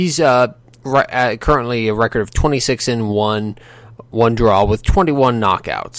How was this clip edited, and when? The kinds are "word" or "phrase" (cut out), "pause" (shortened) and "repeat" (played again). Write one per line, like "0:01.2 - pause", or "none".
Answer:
none